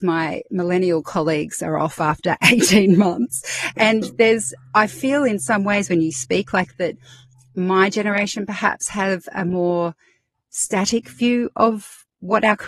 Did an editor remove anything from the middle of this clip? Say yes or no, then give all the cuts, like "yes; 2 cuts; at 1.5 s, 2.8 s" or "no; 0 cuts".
yes; 1 cut; at 6.7 s